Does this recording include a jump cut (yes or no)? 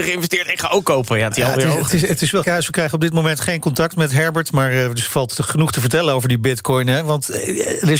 yes